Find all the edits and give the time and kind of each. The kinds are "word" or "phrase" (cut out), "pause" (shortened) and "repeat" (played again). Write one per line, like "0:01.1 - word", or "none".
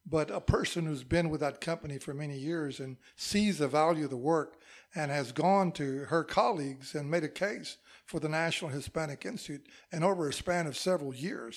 none